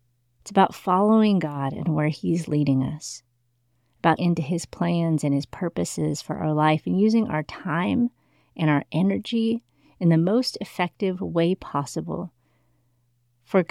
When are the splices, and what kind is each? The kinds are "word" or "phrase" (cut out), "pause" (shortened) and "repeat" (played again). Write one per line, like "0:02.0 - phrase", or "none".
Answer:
0:04.2 - word